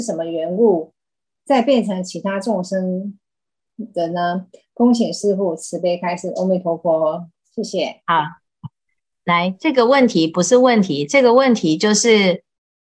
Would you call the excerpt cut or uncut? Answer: uncut